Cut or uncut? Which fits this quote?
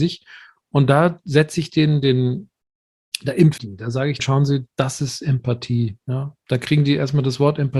cut